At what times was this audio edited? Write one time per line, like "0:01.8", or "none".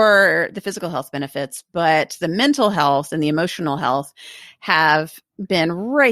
none